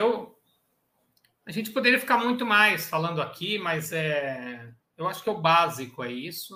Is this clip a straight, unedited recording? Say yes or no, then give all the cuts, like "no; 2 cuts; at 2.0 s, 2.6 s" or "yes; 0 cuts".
yes; 0 cuts